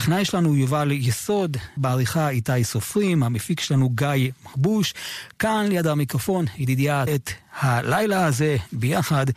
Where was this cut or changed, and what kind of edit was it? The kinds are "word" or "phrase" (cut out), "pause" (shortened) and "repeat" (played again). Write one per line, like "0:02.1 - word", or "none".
0:01.8 - word
0:07.1 - phrase